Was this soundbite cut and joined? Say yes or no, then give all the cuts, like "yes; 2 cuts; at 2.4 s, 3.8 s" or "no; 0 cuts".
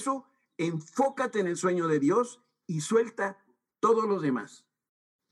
no; 0 cuts